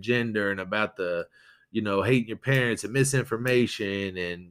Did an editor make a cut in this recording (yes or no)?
no